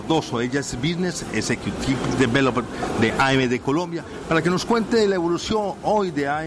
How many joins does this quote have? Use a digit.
0